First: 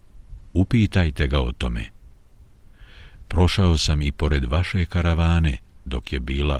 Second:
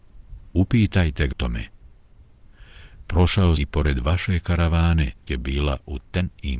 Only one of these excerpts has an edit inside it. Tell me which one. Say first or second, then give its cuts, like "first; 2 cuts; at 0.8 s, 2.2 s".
second; 3 cuts; at 1.3 s, 3.6 s, 5.3 s